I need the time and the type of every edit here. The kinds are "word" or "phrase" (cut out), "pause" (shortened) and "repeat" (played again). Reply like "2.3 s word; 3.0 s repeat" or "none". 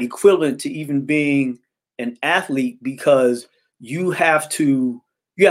none